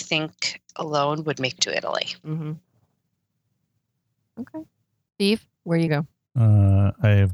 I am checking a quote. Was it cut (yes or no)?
yes